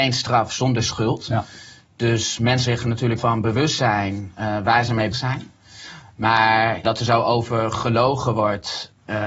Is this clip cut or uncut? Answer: cut